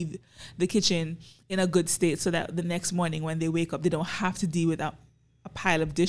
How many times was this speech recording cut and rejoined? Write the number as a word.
zero